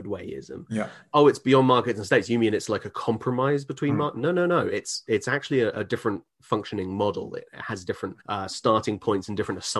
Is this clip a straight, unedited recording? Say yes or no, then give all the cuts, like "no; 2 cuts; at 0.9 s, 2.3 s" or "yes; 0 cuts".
no; 1 cut; at 8.2 s